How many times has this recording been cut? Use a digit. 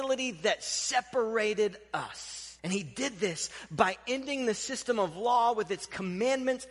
1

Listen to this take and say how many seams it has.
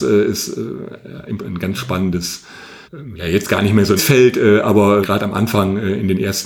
4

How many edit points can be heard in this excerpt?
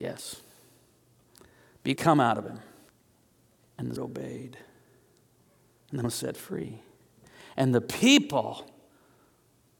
4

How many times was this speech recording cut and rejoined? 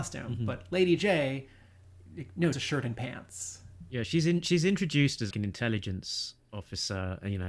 3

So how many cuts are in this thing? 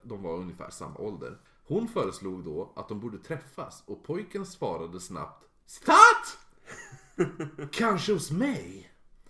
1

